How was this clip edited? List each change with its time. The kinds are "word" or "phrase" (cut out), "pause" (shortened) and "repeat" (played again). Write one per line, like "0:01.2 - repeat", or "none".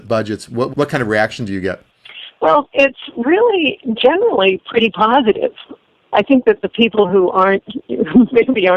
none